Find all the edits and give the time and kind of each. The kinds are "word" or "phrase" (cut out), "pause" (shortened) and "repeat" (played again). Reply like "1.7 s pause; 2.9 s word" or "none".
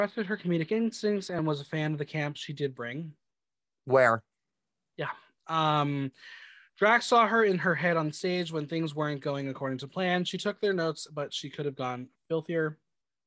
none